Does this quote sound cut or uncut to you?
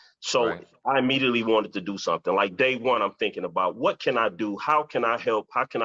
uncut